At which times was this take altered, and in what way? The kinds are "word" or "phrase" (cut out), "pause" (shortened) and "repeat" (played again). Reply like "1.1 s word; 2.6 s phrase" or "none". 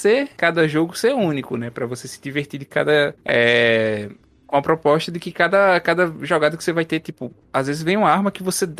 none